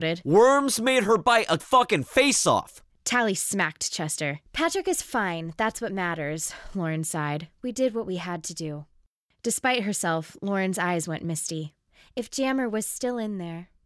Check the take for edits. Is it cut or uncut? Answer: cut